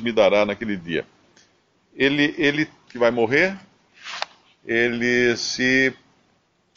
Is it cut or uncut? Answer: cut